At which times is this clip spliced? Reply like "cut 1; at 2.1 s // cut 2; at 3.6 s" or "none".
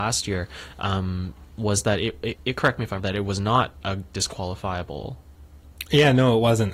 cut 1; at 2.4 s // cut 2; at 3.0 s